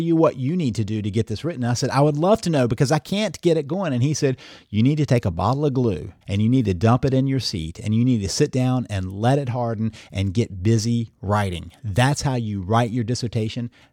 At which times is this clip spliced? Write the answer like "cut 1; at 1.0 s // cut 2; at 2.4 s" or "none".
cut 1; at 6.2 s